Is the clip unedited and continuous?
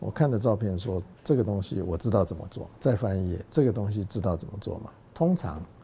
no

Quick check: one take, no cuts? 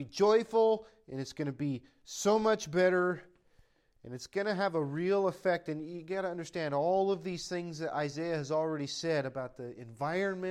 yes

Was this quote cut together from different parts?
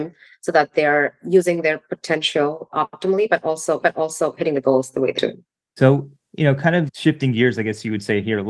yes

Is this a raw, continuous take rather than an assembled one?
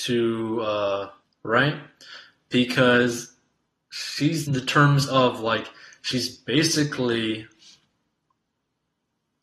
no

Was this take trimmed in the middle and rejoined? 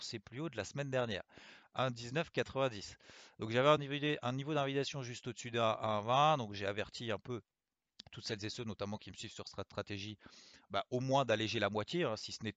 no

